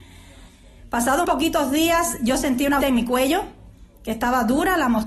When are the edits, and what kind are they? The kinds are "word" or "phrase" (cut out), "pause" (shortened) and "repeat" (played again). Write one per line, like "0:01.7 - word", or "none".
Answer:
0:01.2 - word
0:02.8 - word